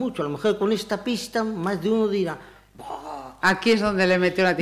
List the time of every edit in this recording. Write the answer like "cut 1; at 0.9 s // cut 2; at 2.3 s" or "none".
none